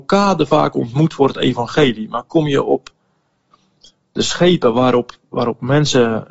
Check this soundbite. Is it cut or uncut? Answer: uncut